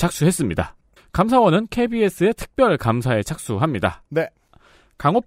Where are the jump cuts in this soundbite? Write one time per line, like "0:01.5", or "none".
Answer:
0:01.0